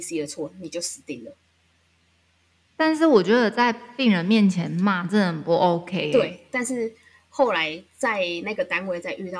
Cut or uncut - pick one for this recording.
uncut